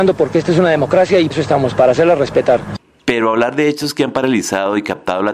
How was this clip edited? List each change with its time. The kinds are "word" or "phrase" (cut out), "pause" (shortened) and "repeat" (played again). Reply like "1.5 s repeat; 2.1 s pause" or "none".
1.3 s word